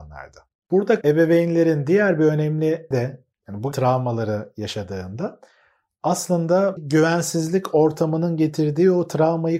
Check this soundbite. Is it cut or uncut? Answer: cut